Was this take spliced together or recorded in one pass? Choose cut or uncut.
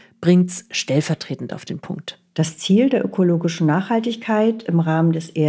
uncut